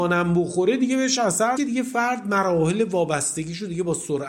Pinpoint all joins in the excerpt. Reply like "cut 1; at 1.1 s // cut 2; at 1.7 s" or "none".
cut 1; at 1.6 s